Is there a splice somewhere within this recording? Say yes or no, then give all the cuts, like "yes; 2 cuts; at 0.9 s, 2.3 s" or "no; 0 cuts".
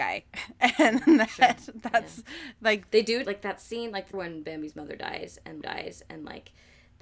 yes; 3 cuts; at 3.2 s, 4.1 s, 5.6 s